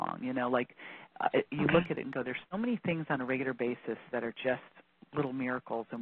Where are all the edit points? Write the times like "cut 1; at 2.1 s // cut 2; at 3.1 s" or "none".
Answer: none